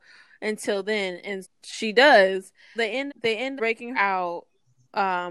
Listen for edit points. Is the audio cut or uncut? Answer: cut